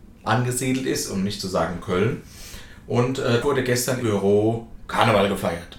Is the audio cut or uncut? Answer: cut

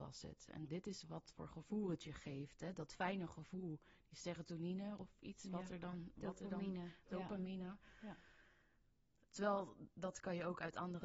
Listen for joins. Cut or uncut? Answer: uncut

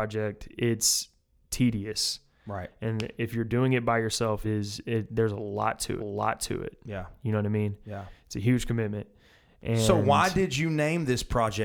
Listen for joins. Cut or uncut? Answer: cut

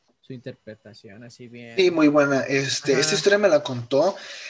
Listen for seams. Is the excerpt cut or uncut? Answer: uncut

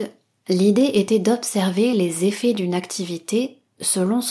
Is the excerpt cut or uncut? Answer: uncut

